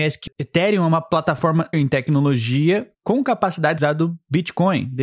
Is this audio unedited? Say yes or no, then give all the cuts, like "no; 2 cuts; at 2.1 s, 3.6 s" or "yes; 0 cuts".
no; 2 cuts; at 1.7 s, 3.8 s